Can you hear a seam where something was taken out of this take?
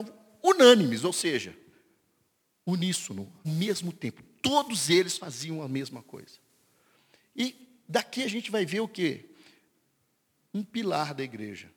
yes; 1 cut; at 3.4 s

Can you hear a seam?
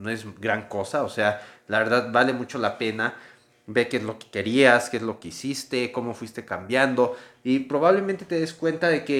no; 0 cuts

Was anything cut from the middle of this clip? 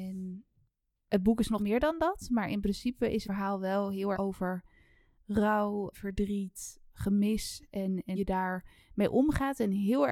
yes; 6 cuts; at 1.6 s, 3.2 s, 4.1 s, 5.9 s, 6.9 s, 8.2 s

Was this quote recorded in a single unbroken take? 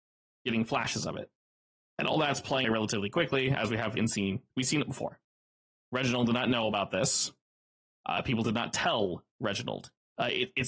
no; 2 cuts; at 2.6 s, 4.0 s

